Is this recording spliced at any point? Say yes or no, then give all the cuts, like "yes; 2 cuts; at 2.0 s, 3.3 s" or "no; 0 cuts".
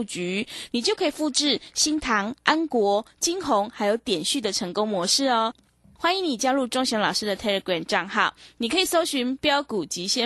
no; 0 cuts